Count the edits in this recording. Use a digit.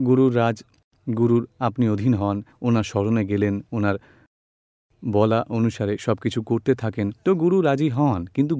1